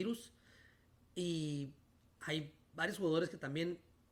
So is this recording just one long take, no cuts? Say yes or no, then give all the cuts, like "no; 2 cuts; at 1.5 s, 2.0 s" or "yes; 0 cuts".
yes; 0 cuts